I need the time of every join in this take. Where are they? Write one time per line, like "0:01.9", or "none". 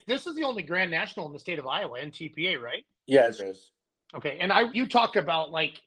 0:02.9
0:03.4
0:04.7